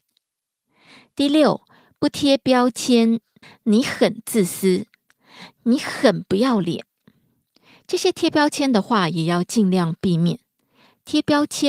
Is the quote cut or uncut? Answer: cut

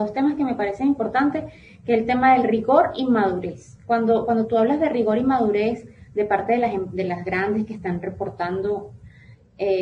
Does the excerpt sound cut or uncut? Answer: uncut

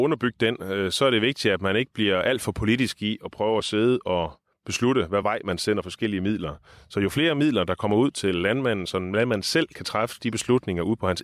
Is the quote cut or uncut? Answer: uncut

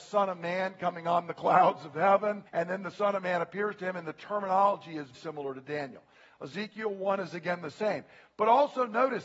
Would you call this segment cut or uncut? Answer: cut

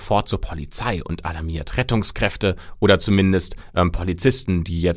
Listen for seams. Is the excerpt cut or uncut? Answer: uncut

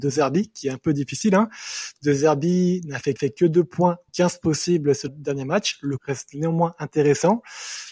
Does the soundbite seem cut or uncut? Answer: cut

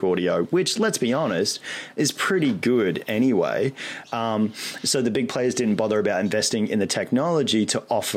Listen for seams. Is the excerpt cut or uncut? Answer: uncut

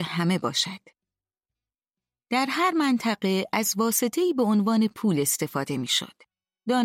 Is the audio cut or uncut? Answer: uncut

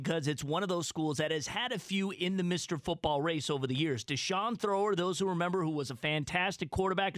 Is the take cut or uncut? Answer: uncut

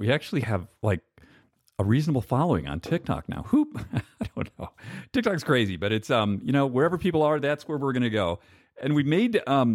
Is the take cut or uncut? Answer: uncut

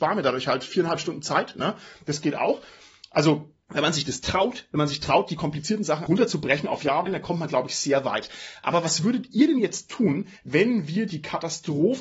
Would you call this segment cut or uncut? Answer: cut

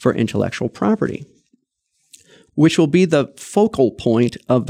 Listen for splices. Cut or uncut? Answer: uncut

